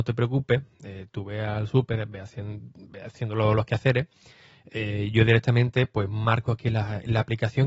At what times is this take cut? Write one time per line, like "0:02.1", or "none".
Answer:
none